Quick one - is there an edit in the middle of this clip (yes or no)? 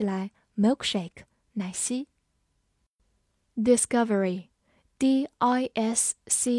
no